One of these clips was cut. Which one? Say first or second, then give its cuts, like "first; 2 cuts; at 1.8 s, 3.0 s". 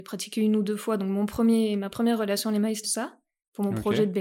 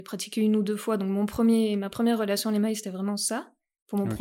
first; 1 cut; at 2.8 s